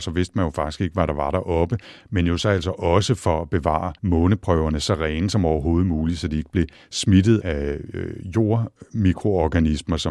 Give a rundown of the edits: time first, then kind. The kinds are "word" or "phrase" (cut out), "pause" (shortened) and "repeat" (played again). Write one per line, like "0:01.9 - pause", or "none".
0:04.0 - pause
0:07.4 - word